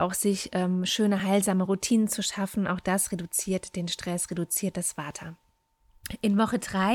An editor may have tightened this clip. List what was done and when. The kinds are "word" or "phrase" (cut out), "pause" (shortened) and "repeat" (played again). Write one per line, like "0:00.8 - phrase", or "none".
none